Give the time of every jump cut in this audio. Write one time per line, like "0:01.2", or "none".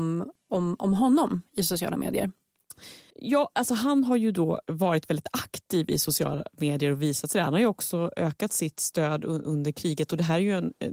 0:03.1

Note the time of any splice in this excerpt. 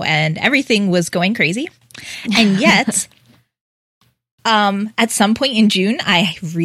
none

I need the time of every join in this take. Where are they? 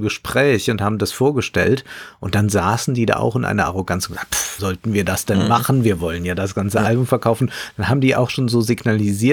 0:04.6

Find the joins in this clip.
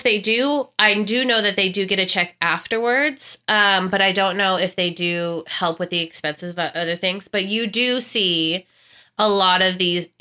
none

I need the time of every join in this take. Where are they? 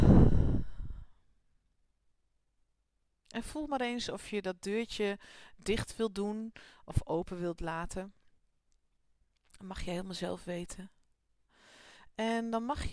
none

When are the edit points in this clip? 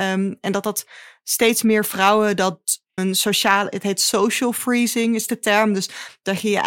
0:03.0

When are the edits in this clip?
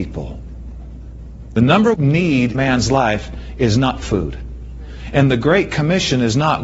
0:01.9
0:02.5
0:04.0

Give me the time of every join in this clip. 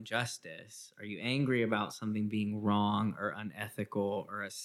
none

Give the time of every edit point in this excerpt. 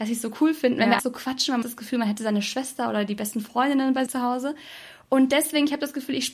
0:01.0
0:01.6
0:04.1

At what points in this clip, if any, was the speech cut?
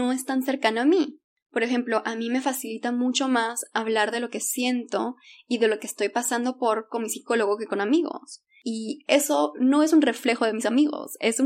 none

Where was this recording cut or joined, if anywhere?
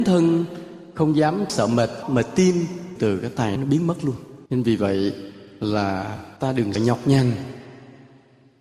0:01.5
0:02.0
0:03.0
0:03.6
0:04.5
0:06.4
0:06.7

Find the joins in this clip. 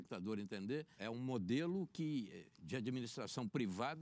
0:01.0

